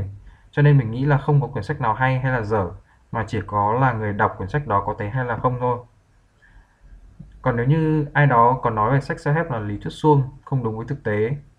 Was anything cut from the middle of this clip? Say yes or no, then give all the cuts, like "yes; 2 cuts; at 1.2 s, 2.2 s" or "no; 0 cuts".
yes; 1 cut; at 5.1 s